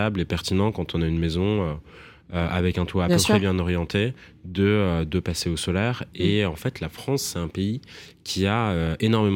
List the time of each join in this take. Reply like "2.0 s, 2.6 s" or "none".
none